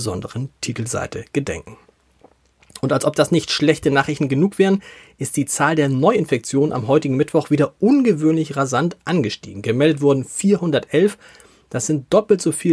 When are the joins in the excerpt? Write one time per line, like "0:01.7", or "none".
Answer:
none